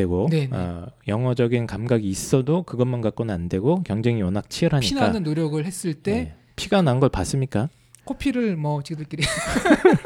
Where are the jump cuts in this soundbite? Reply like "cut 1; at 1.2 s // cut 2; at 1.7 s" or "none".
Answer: none